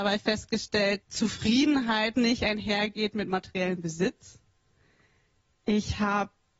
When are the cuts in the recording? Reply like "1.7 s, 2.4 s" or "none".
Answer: 1.0 s, 2.1 s